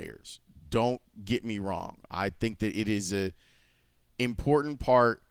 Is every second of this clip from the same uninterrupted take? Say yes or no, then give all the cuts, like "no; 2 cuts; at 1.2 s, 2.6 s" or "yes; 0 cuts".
yes; 0 cuts